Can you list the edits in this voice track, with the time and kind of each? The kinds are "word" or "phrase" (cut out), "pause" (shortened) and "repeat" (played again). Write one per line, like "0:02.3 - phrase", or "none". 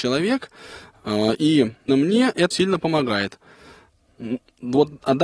0:01.9 - word
0:02.5 - word